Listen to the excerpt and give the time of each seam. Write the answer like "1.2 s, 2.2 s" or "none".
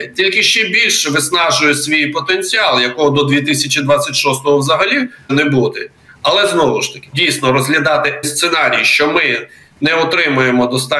5.3 s, 7.1 s, 8.2 s